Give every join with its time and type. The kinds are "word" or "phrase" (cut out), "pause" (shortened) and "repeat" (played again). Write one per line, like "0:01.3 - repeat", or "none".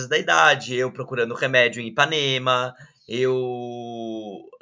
none